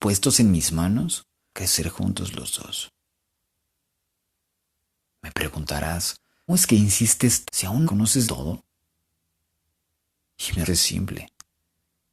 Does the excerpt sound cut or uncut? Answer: cut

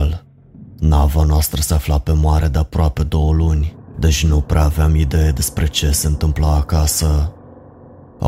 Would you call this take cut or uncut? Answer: uncut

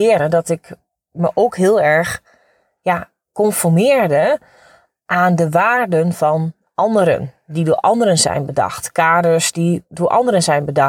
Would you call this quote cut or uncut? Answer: uncut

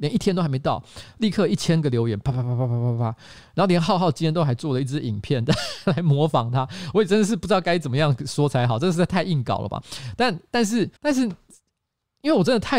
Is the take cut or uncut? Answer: cut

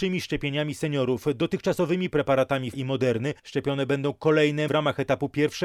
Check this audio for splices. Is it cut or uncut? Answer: cut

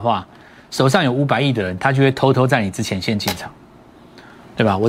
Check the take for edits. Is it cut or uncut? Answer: uncut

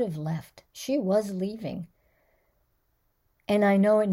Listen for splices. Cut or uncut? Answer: uncut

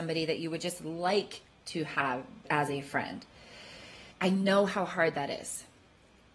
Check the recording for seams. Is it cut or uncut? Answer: cut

